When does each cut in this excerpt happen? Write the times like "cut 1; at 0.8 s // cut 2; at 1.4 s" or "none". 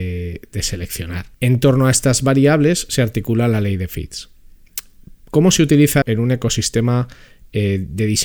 cut 1; at 1.3 s // cut 2; at 6.0 s

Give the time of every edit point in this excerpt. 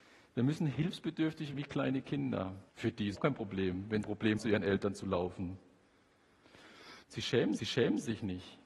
cut 1; at 1.5 s // cut 2; at 2.7 s // cut 3; at 3.1 s // cut 4; at 4.0 s // cut 5; at 4.4 s // cut 6; at 7.0 s // cut 7; at 7.6 s

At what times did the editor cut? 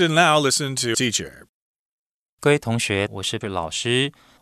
cut 1; at 0.9 s // cut 2; at 3.1 s // cut 3; at 3.4 s

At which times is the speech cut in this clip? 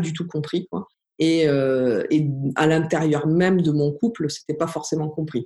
cut 1; at 0.9 s

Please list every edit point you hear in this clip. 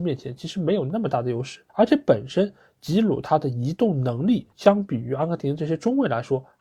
cut 1; at 1.7 s // cut 2; at 4.5 s

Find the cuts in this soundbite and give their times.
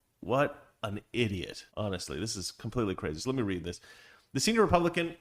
cut 1; at 1.7 s

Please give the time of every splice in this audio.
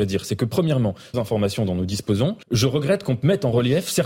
cut 1; at 1.1 s // cut 2; at 2.4 s

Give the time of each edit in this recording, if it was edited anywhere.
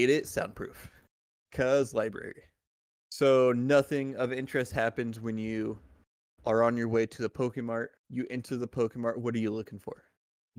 cut 1; at 8.0 s

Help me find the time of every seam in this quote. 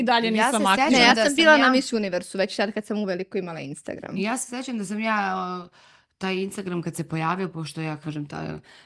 none

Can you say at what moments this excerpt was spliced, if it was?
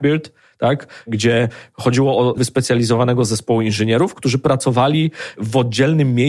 cut 1; at 2.4 s

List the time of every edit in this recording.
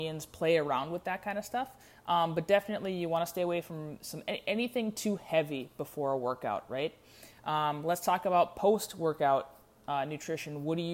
none

